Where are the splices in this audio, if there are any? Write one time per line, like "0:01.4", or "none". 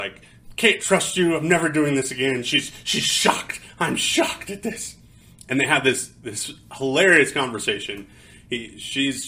none